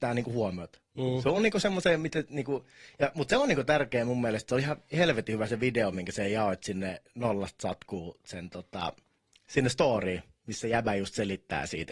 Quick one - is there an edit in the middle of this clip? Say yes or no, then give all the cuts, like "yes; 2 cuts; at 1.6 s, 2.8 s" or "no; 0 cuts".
no; 0 cuts